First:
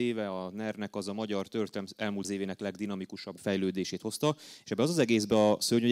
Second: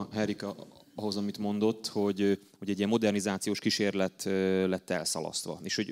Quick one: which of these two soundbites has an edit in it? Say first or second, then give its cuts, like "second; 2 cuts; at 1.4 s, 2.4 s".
first; 2 cuts; at 2.2 s, 3.4 s